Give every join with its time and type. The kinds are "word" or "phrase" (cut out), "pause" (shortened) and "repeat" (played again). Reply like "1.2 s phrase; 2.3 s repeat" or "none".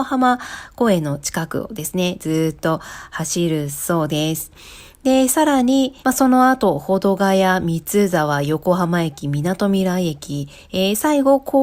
6.0 s pause